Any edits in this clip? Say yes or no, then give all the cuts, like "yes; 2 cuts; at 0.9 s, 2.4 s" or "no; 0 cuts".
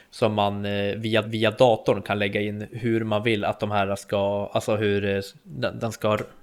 yes; 1 cut; at 1.2 s